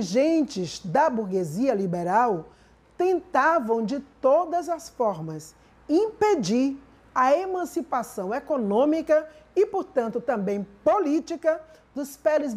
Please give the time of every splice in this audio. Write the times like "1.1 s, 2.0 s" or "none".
none